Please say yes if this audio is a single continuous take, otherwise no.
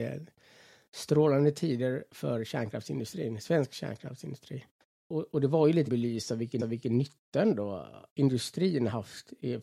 no